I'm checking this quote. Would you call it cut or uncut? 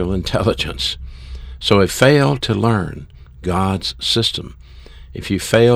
cut